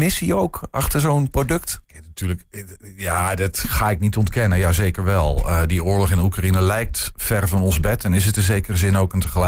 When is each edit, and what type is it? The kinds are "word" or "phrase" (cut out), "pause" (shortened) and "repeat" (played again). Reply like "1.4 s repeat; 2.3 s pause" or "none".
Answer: 1.8 s pause